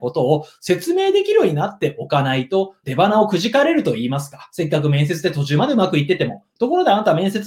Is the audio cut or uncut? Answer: cut